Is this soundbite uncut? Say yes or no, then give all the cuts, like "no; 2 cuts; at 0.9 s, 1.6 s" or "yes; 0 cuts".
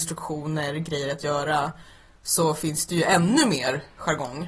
yes; 0 cuts